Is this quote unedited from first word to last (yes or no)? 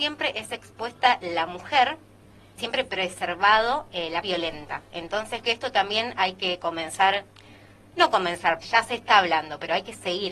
no